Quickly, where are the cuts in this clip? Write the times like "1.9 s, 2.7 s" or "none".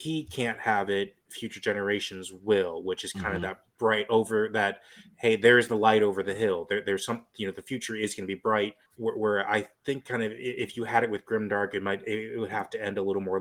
3.7 s, 8.9 s, 9.7 s